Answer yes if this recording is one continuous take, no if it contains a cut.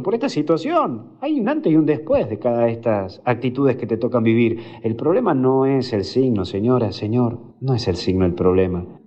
yes